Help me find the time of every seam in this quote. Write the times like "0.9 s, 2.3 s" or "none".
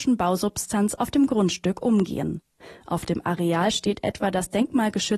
none